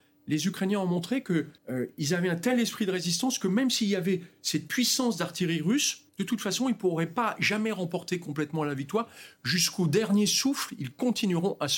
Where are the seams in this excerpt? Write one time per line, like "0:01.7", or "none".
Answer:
0:01.6
0:06.1